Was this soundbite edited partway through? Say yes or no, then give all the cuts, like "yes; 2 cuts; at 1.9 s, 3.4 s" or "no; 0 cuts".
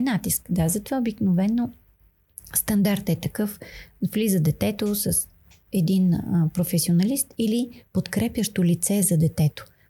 no; 0 cuts